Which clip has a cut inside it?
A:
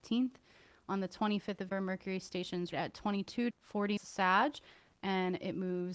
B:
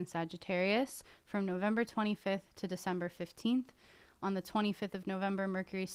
A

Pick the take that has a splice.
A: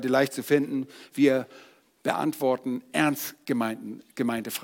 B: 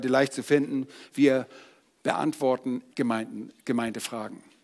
B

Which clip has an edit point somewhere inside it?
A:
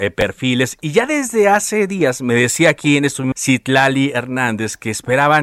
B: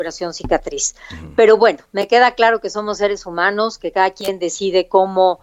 A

